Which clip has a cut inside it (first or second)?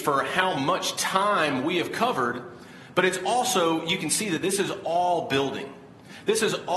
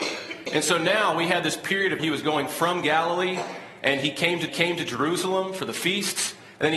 second